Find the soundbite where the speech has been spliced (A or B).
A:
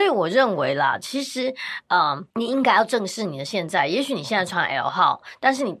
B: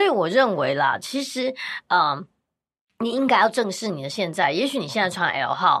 A